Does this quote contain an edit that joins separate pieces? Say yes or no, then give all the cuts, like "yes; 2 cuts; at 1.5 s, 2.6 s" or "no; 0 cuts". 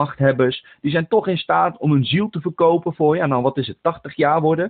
no; 0 cuts